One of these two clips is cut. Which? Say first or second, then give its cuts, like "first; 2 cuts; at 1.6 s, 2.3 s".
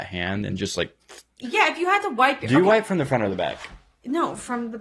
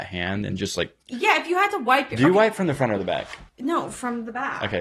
second; 2 cuts; at 1.0 s, 3.5 s